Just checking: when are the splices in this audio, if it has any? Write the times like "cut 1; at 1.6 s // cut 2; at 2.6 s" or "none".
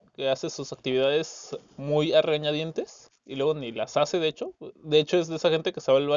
cut 1; at 3.1 s // cut 2; at 4.8 s